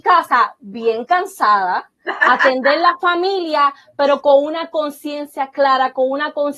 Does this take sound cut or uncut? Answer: uncut